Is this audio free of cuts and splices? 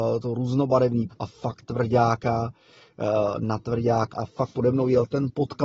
no; 3 cuts; at 1.1 s, 1.6 s, 4.1 s

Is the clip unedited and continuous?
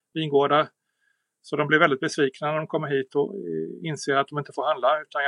yes; 0 cuts

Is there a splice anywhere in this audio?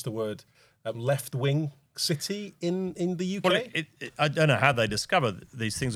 no; 0 cuts

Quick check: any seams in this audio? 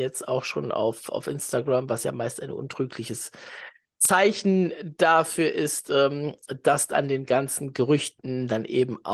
no; 0 cuts

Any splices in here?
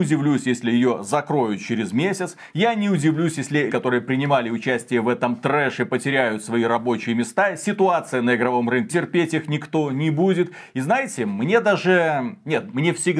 yes; 2 cuts; at 3.7 s, 8.9 s

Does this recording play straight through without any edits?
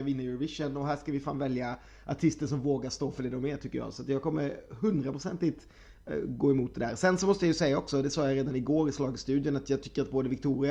yes; 0 cuts

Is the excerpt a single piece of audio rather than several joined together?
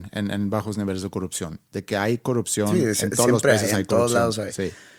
yes; 0 cuts

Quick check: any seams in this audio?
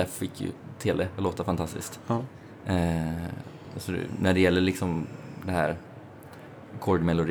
no; 0 cuts

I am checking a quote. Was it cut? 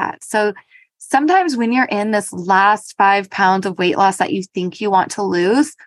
no; 0 cuts

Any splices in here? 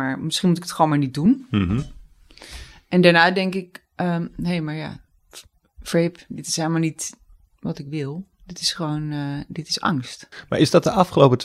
no; 0 cuts

